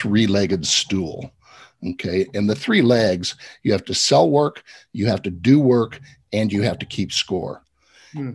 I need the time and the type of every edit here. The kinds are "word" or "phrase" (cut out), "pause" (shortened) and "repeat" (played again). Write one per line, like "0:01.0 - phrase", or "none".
none